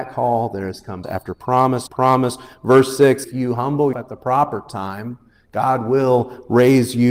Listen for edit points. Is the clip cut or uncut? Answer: cut